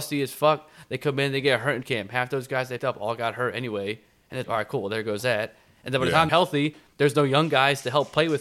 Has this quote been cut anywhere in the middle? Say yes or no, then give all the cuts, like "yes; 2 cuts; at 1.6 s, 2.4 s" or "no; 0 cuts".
yes; 4 cuts; at 1.8 s, 2.8 s, 4.4 s, 6.3 s